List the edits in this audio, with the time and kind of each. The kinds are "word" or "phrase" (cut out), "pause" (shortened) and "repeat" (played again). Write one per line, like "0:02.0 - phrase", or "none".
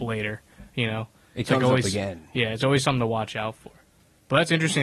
none